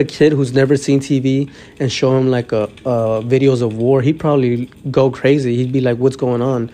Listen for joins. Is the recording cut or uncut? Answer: uncut